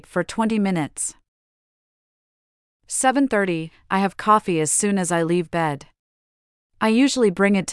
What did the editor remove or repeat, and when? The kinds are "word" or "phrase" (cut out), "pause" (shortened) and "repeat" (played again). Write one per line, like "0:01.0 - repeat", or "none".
none